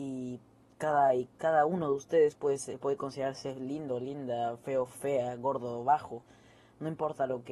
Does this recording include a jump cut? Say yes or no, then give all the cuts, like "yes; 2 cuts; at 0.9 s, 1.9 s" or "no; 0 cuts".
no; 0 cuts